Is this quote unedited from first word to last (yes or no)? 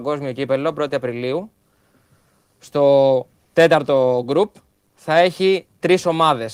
yes